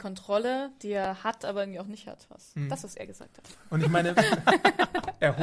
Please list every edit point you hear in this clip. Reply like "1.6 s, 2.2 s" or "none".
none